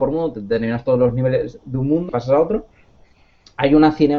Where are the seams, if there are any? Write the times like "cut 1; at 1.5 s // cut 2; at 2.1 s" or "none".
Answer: cut 1; at 2.1 s